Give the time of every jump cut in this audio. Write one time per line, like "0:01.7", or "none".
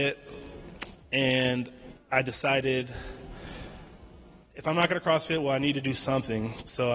none